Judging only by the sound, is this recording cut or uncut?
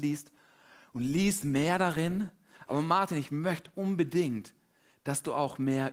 uncut